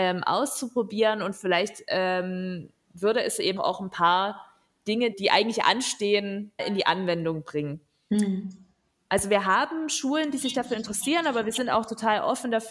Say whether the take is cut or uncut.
cut